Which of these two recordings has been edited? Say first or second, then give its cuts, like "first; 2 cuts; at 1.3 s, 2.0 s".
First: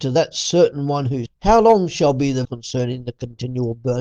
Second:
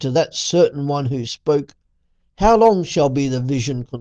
first; 2 cuts; at 1.3 s, 2.4 s